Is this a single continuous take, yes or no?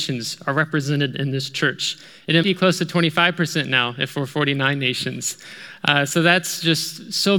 no